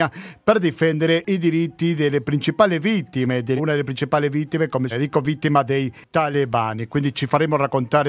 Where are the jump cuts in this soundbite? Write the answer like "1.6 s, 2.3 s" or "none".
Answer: 3.6 s, 4.9 s